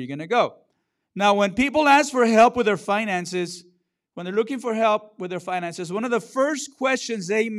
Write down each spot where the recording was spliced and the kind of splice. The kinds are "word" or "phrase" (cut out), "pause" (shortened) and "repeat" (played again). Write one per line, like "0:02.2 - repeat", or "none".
none